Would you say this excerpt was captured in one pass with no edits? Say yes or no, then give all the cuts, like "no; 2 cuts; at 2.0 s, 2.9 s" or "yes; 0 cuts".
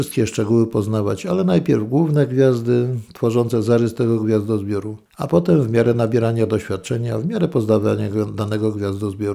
yes; 0 cuts